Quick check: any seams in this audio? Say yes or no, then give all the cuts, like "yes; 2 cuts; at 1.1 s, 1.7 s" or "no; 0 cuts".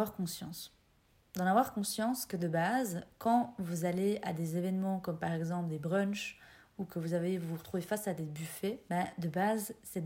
no; 0 cuts